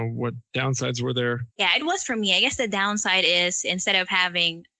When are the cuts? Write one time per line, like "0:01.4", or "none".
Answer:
0:01.5